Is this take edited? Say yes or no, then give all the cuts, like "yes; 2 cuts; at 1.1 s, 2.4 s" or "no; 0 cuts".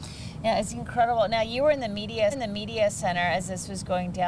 yes; 1 cut; at 2.3 s